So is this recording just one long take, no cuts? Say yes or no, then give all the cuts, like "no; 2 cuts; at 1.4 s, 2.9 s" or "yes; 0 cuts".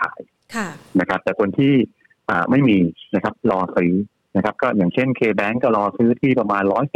yes; 0 cuts